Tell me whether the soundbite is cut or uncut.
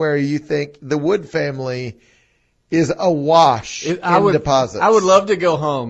uncut